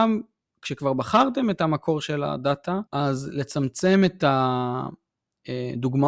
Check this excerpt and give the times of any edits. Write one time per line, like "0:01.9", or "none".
0:02.9

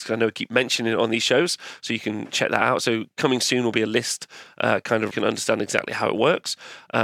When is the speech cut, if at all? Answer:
0:05.1

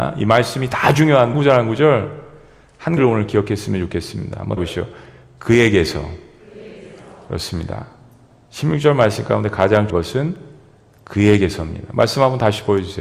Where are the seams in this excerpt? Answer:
0:01.3
0:03.0
0:04.6
0:09.9

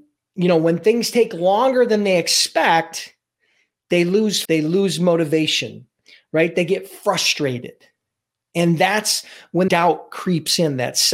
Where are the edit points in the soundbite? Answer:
0:04.4
0:09.7

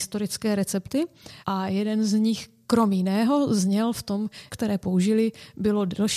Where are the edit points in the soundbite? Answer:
0:01.4
0:04.5

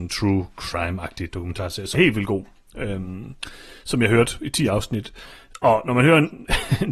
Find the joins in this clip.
0:01.9

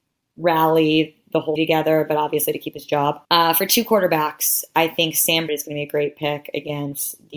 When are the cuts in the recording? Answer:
0:01.6
0:03.2
0:05.5

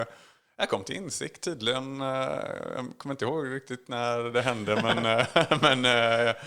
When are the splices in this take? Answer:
none

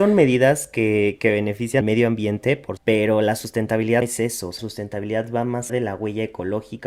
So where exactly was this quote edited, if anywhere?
0:01.8
0:02.8
0:04.0
0:04.6
0:05.7

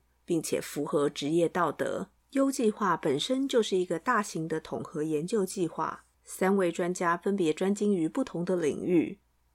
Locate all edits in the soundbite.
0:02.2
0:06.2

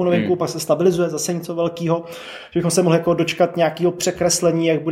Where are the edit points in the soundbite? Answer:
none

